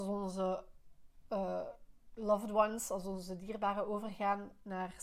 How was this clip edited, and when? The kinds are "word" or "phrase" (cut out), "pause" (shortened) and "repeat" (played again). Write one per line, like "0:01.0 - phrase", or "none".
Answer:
none